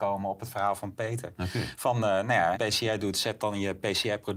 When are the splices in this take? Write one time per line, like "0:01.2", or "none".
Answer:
0:02.5